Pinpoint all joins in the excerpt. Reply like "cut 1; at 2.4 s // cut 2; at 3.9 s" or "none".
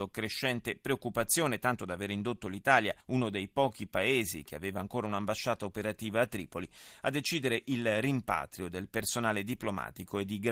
cut 1; at 3.0 s